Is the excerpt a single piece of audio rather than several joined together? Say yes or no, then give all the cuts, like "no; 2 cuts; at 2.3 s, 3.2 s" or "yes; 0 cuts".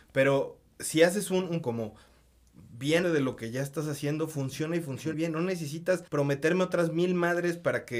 no; 4 cuts; at 1.6 s, 3.0 s, 5.1 s, 6.1 s